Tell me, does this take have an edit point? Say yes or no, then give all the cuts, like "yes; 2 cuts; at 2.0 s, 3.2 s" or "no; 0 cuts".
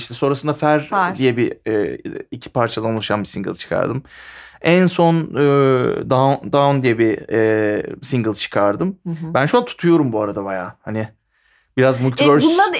no; 0 cuts